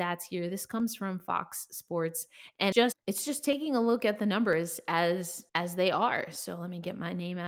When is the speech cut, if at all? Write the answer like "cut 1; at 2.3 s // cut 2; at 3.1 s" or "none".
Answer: cut 1; at 2.7 s // cut 2; at 5.5 s